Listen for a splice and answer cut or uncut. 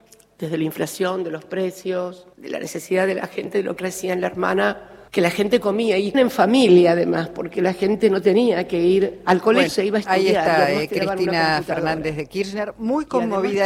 cut